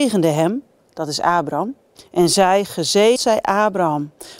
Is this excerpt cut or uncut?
cut